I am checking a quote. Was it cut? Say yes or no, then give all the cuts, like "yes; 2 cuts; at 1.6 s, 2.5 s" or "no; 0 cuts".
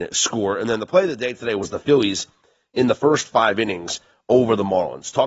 no; 0 cuts